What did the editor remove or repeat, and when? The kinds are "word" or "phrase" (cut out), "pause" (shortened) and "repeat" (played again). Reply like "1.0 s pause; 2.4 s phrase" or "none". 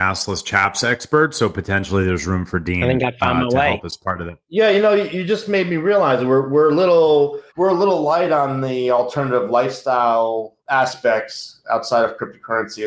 7.5 s pause; 10.6 s pause